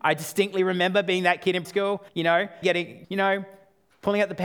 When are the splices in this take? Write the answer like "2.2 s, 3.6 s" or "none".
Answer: 1.6 s, 2.1 s, 2.6 s, 3.0 s